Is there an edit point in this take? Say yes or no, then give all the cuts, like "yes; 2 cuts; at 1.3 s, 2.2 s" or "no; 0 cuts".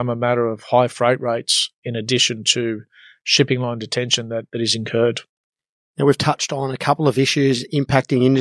no; 0 cuts